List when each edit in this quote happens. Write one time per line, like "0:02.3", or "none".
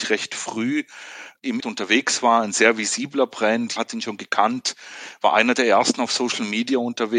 0:01.6
0:03.8